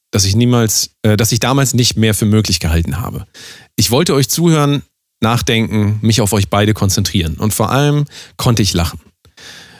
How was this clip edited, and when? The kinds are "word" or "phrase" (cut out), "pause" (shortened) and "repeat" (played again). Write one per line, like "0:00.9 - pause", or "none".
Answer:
0:01.0 - pause